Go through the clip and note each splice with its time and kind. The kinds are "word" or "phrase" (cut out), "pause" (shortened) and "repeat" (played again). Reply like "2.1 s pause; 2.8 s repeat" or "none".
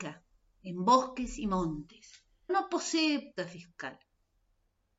2.5 s word; 3.4 s word